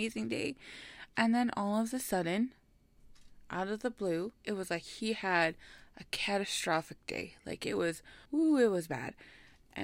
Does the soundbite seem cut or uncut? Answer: cut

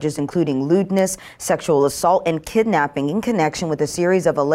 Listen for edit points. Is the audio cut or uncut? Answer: uncut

